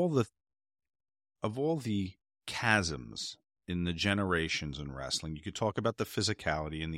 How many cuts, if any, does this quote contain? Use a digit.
1